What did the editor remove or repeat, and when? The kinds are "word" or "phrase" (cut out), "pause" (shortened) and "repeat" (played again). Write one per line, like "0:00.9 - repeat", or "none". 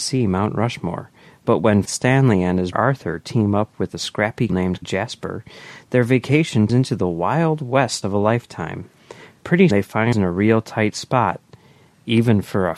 0:01.8 - word
0:02.7 - word
0:04.5 - word
0:04.8 - word
0:06.7 - word
0:08.0 - word
0:09.7 - word
0:10.1 - word